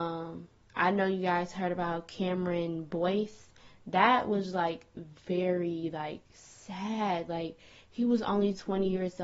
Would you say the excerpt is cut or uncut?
uncut